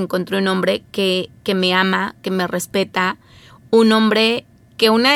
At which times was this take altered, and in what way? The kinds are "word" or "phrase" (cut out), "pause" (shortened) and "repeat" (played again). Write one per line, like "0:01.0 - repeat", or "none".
none